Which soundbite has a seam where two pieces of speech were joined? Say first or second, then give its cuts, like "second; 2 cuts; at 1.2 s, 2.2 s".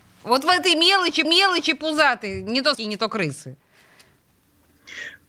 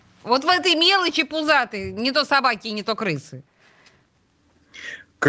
first; 2 cuts; at 1.2 s, 2.7 s